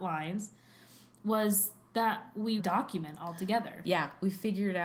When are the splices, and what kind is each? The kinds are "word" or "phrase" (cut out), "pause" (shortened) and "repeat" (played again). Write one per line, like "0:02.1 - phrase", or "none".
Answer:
0:02.6 - phrase